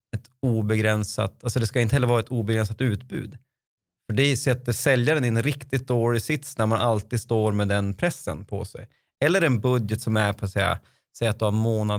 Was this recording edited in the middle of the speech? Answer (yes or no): no